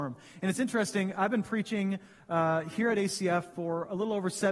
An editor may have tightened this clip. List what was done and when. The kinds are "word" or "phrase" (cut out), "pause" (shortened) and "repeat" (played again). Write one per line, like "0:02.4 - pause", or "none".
none